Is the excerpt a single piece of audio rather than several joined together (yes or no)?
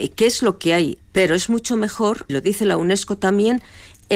no